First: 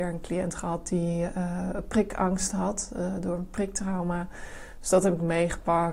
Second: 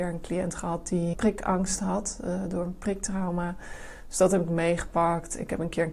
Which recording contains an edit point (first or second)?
second